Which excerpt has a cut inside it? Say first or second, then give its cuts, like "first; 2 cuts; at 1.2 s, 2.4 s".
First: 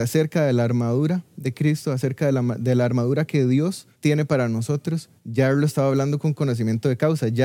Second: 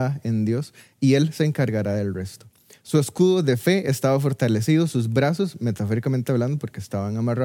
first; 1 cut; at 4.0 s